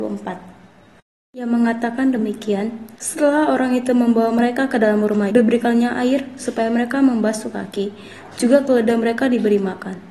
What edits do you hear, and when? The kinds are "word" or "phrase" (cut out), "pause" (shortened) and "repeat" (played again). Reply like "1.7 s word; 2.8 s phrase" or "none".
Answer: 2.9 s pause; 5.3 s word

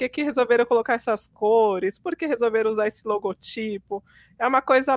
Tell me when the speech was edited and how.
none

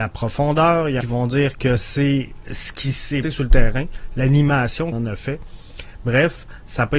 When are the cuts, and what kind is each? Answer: 1.0 s phrase; 2.4 s word; 3.2 s word; 4.9 s word

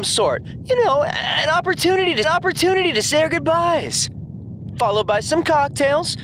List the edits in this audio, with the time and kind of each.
2.2 s repeat

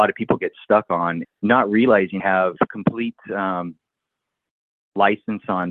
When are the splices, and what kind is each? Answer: 1.2 s word; 2.2 s word; 2.7 s word

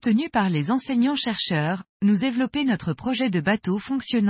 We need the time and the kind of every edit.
2.2 s word

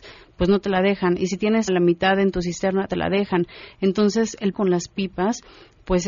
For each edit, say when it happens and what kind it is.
1.7 s word; 2.9 s word; 4.5 s word

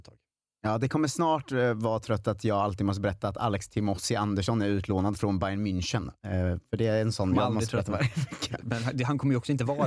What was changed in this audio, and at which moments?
none

